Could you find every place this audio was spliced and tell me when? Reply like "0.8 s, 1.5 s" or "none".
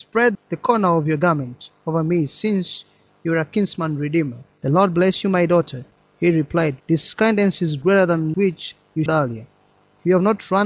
4.5 s, 6.8 s, 8.3 s, 9.1 s